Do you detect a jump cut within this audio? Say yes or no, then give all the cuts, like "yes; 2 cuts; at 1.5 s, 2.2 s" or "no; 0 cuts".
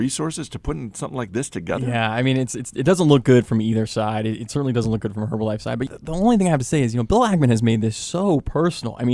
yes; 1 cut; at 5.9 s